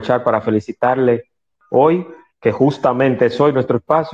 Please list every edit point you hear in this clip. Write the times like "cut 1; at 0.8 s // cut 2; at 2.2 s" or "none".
none